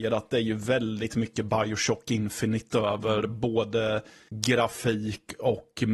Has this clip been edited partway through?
no; 0 cuts

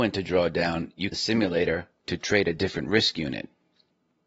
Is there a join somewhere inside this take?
yes; 1 cut; at 1.1 s

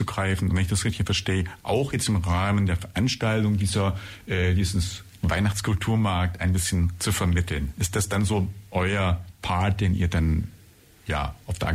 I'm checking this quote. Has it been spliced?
no; 0 cuts

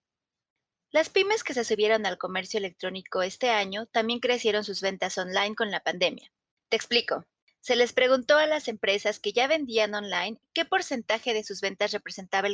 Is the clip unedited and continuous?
yes; 0 cuts

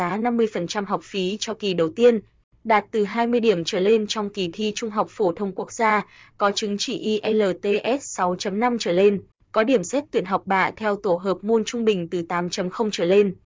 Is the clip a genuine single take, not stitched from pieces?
yes; 0 cuts

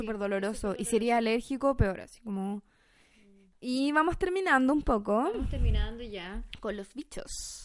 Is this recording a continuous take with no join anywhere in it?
yes; 0 cuts

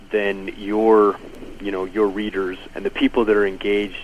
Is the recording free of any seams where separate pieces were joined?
no; 1 cut; at 2.7 s

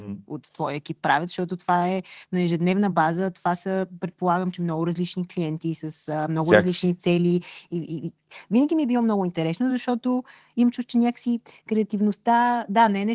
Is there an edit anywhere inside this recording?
no; 0 cuts

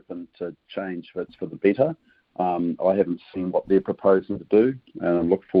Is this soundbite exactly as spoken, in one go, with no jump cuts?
yes; 0 cuts

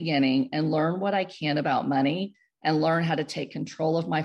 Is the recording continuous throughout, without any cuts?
yes; 0 cuts

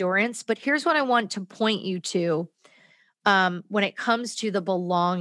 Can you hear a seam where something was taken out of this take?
no; 0 cuts

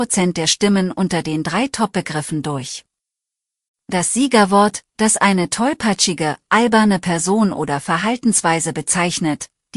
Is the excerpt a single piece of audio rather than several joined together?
yes; 0 cuts

